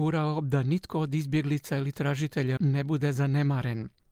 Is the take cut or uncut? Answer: cut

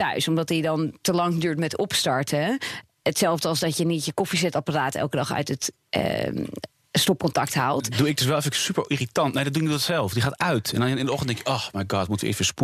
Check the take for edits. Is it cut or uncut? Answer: uncut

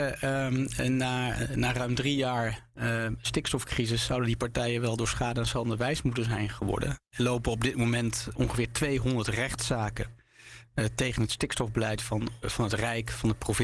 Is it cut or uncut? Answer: cut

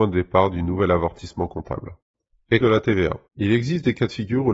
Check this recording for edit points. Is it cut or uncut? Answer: cut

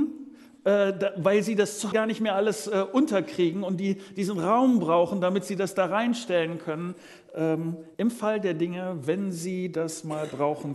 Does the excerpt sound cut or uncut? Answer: cut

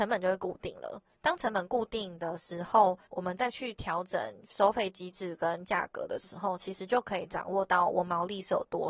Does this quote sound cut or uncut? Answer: cut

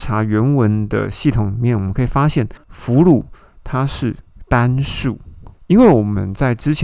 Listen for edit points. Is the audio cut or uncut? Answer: cut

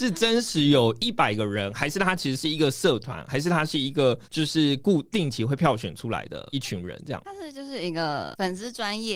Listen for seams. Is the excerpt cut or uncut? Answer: cut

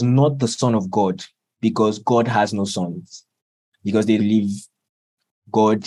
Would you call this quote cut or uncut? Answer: cut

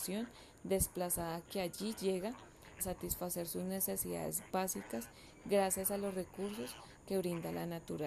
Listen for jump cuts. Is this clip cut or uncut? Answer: cut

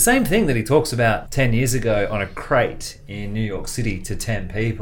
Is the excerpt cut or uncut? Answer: cut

